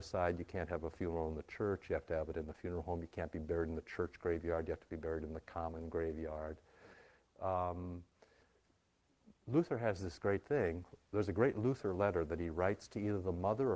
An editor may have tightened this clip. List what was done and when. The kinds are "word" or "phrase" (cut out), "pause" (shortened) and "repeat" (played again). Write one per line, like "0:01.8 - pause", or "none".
0:09.4 - pause
0:11.0 - pause